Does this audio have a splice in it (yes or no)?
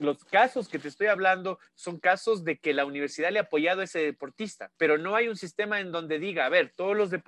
yes